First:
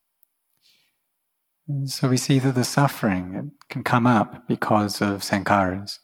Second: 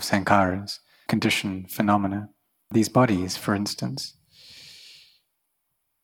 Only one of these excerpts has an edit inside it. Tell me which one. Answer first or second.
second